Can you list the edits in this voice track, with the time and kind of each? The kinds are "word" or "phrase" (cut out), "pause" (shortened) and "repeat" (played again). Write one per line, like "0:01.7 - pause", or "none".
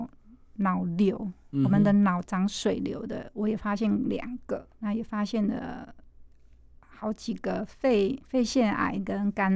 0:04.7 - pause